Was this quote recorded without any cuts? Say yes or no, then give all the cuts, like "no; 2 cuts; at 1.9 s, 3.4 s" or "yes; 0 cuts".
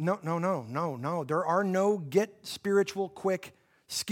yes; 0 cuts